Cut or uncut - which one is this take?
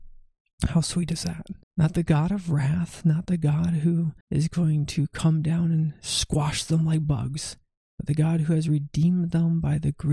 cut